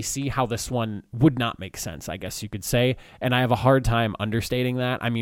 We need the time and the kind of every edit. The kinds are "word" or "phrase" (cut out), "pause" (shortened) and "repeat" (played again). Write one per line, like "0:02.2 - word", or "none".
none